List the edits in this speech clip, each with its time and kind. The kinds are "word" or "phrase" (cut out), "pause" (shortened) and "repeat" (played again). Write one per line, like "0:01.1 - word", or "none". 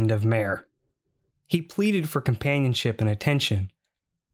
none